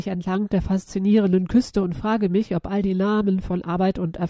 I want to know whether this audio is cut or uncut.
uncut